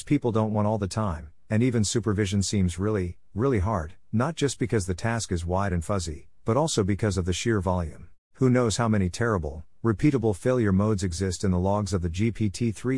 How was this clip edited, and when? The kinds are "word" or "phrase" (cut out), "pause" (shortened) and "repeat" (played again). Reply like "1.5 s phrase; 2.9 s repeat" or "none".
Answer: 8.2 s pause